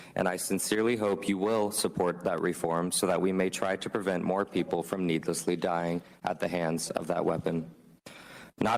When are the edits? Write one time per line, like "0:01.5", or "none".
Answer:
none